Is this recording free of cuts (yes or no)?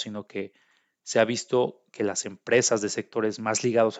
yes